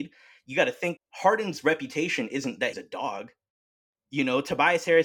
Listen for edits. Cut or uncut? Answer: cut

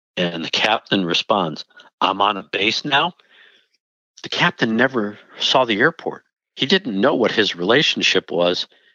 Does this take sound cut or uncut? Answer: uncut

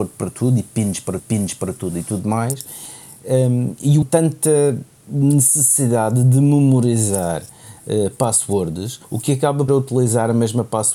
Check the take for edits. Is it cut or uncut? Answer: cut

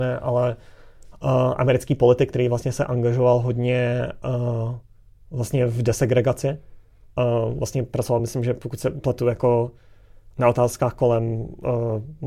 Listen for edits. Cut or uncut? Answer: uncut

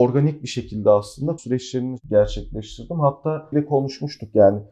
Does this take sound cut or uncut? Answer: cut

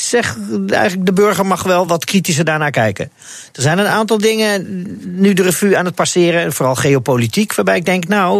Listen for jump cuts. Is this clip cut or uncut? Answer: uncut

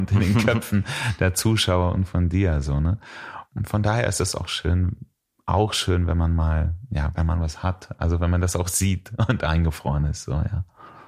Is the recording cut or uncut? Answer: uncut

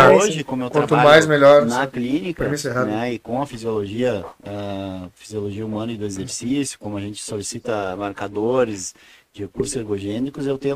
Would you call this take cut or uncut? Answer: uncut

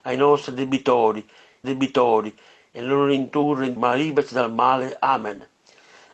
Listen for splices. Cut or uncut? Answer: cut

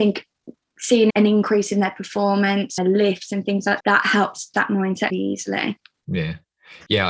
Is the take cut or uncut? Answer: cut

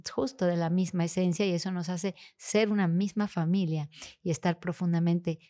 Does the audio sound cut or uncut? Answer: uncut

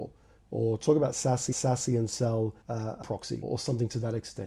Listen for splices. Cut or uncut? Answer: cut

